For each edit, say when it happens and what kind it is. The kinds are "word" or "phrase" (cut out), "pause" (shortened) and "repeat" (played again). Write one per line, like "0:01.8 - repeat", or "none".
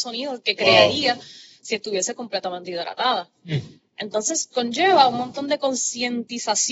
0:04.5 - word

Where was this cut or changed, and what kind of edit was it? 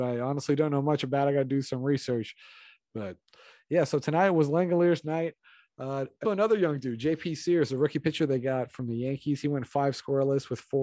0:06.2 - word

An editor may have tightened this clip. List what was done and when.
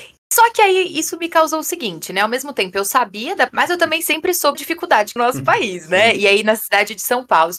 0:03.5 - phrase
0:04.5 - word
0:05.2 - phrase

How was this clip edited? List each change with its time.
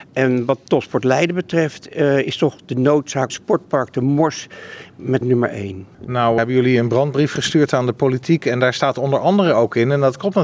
0:03.3 - phrase
0:05.2 - phrase
0:06.4 - word

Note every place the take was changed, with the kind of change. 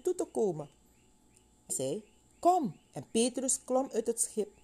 0:01.7 - word
0:02.8 - pause

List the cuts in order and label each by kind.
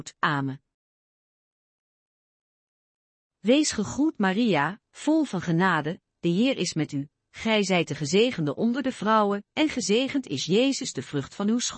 none

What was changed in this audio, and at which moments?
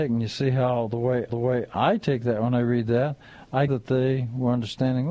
0:01.3 - repeat
0:03.7 - phrase

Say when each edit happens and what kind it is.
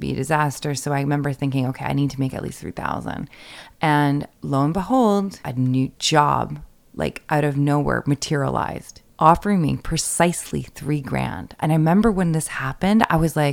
none

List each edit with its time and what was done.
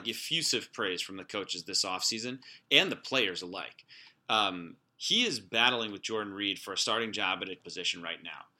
0:07.6 - word

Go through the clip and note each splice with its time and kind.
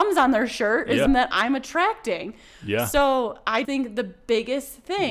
0:01.1 - word
0:03.6 - word

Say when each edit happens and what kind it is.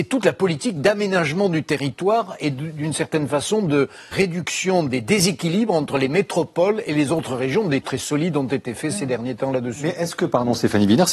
0:04.1 - word
0:07.8 - word

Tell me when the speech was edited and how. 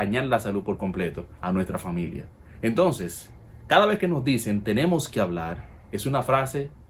0:01.4 - pause
0:05.8 - pause

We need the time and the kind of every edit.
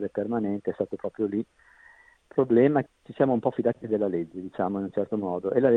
0:02.9 - word

